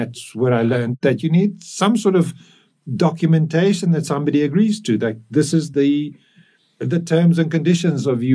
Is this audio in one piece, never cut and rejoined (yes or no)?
yes